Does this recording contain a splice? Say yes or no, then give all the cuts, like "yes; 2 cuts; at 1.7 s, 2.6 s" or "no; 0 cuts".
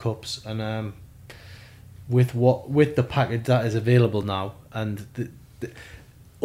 no; 0 cuts